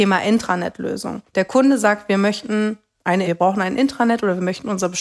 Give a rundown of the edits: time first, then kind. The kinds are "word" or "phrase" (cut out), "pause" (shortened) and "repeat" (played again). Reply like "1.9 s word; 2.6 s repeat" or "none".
1.3 s pause; 3.2 s word